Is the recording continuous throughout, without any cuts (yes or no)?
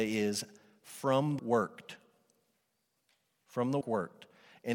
no